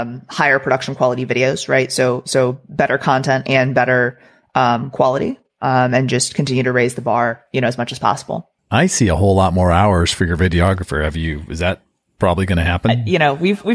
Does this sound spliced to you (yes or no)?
yes